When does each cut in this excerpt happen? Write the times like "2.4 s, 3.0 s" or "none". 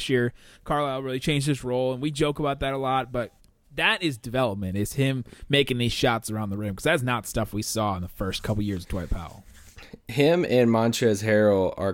3.4 s